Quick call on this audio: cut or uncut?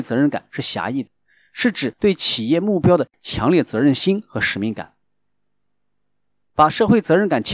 uncut